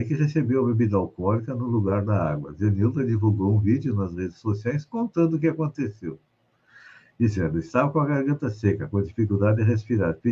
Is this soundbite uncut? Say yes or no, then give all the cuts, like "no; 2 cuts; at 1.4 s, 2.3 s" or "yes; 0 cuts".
yes; 0 cuts